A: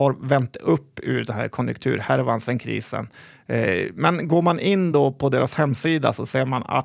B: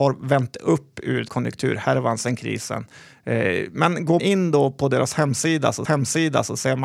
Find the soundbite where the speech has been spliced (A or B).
B